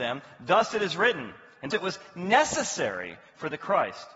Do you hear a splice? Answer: yes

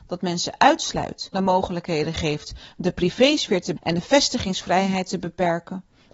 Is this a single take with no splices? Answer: no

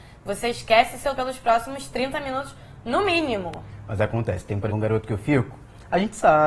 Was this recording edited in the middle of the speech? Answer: yes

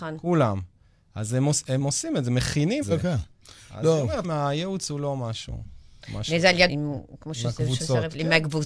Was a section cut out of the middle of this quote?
yes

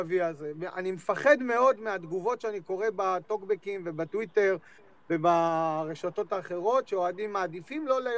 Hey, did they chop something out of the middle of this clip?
no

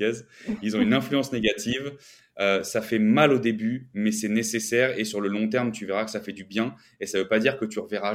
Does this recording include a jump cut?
no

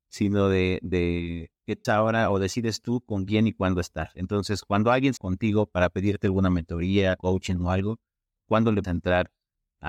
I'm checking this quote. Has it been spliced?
yes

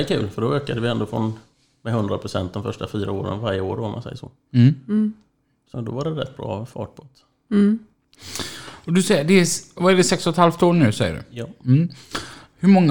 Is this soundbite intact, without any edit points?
no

